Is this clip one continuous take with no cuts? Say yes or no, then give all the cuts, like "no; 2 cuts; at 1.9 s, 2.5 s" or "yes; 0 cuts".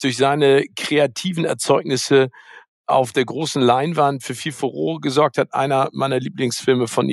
yes; 0 cuts